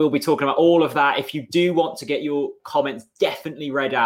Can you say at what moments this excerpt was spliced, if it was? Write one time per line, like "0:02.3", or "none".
none